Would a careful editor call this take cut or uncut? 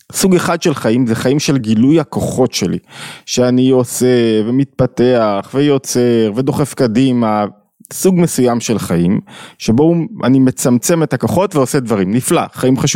uncut